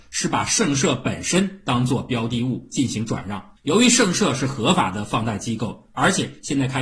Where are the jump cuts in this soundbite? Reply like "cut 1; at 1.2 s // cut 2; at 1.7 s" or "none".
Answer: cut 1; at 3.6 s